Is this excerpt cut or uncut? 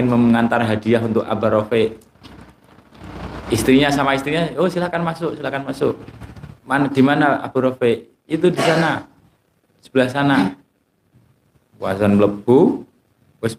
cut